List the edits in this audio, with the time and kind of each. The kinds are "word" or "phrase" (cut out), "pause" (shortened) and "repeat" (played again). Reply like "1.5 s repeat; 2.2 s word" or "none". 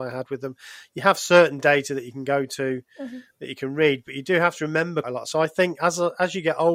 5.0 s word